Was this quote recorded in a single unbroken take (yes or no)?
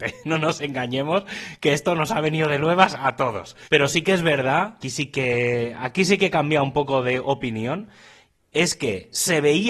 no